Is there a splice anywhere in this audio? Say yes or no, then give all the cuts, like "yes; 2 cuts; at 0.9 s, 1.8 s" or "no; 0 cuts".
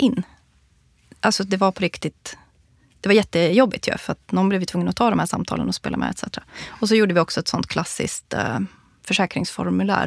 no; 0 cuts